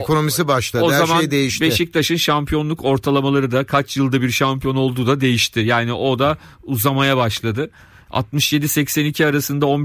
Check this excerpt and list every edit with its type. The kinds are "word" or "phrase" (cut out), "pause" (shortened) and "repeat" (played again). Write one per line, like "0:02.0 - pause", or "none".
none